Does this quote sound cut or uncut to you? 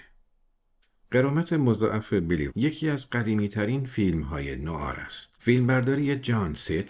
cut